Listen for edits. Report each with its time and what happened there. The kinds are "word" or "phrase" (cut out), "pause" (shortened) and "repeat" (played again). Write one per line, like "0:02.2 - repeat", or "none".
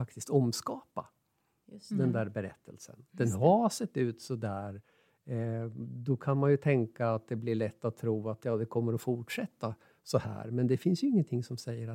none